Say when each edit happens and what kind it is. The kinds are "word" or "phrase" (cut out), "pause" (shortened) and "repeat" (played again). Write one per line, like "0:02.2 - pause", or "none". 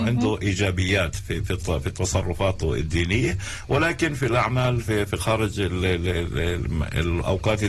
none